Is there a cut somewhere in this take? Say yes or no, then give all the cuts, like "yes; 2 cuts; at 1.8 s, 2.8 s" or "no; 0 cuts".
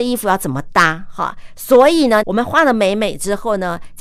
yes; 1 cut; at 2.2 s